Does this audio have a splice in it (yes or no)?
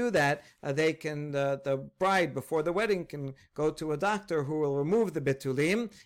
no